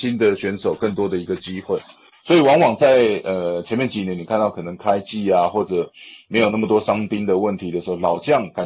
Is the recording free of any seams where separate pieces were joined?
yes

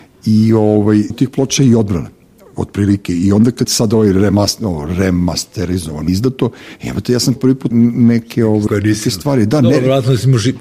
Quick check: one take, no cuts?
no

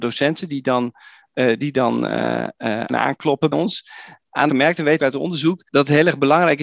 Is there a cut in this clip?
yes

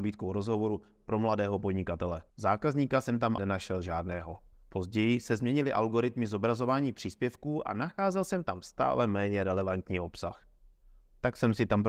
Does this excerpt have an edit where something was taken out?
yes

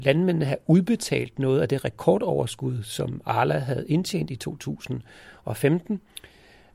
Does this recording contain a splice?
no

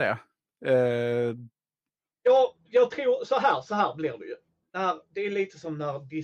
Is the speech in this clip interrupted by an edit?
no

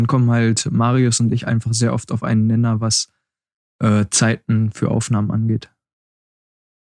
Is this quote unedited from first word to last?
yes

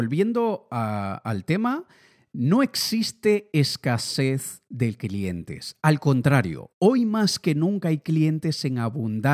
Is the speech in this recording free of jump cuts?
yes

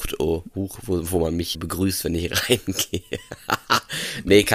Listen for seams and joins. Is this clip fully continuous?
no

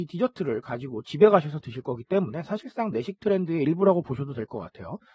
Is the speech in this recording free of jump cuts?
yes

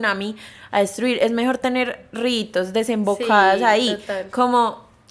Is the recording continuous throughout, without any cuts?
yes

